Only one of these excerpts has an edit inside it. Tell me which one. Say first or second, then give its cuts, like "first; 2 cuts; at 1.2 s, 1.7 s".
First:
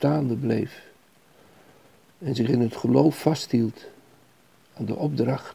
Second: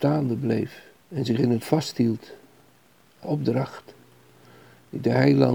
second; 3 cuts; at 1.0 s, 1.6 s, 3.2 s